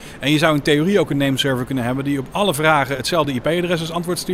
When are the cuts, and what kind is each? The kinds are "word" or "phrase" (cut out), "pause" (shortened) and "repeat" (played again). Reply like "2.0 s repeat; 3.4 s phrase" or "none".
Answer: none